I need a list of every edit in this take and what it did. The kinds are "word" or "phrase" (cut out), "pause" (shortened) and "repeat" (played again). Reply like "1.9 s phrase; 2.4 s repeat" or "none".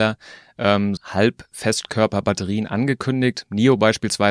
1.0 s word